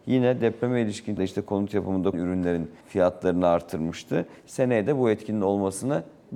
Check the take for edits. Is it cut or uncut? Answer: cut